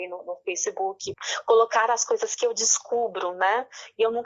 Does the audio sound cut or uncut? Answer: uncut